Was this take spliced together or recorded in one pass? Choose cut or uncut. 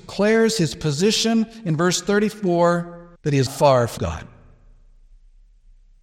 cut